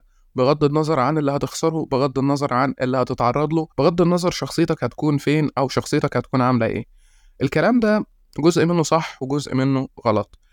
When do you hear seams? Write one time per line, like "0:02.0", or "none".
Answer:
0:03.7